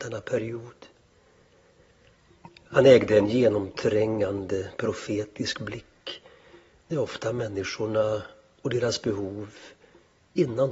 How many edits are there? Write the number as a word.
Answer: one